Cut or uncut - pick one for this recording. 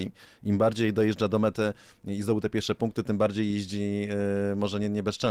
uncut